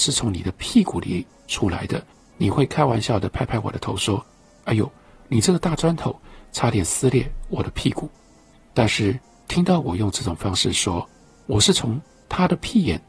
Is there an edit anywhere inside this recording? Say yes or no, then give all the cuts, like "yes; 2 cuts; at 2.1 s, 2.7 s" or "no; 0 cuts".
no; 0 cuts